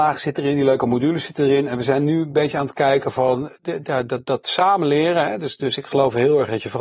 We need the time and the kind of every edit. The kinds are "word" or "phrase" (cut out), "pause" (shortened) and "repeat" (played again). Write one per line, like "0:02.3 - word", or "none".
none